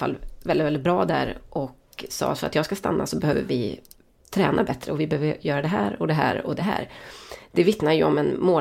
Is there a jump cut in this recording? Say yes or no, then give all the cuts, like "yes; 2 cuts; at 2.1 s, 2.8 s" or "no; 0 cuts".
no; 0 cuts